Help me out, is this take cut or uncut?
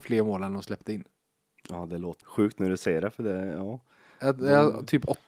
cut